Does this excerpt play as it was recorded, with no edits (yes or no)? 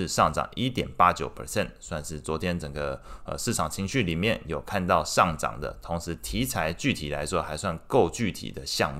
yes